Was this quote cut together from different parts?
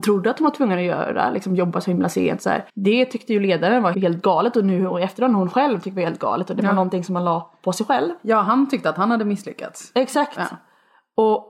yes; 2 cuts; at 2.7 s, 3.9 s

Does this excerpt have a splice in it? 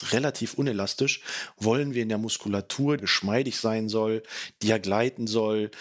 yes; 1 cut; at 3.0 s

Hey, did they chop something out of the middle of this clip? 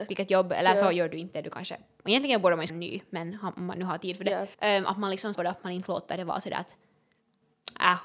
yes; 3 cuts; at 2.7 s, 4.5 s, 5.3 s

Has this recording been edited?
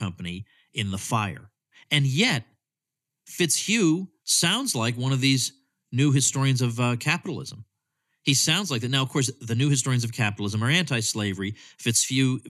no; 0 cuts

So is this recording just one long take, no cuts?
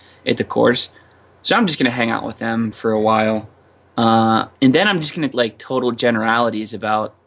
no; 3 cuts; at 2.7 s, 4.6 s, 5.3 s

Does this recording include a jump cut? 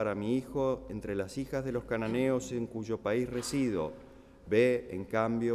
no; 0 cuts

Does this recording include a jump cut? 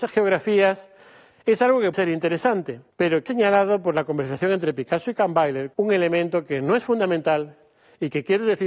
yes; 4 cuts; at 1.9 s, 2.9 s, 3.3 s, 5.7 s

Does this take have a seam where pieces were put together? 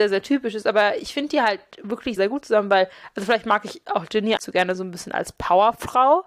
yes; 2 cuts; at 2.2 s, 4.4 s

